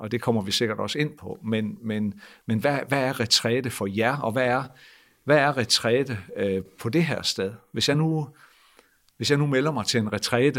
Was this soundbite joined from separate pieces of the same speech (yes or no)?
no